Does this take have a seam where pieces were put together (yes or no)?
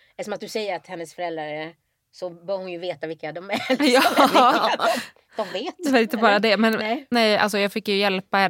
no